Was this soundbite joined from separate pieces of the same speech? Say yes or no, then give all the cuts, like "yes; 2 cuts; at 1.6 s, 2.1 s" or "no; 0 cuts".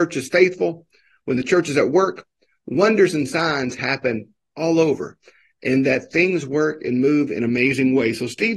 no; 0 cuts